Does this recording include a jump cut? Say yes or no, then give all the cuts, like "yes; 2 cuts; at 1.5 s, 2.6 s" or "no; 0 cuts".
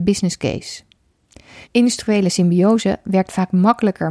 yes; 1 cut; at 1.6 s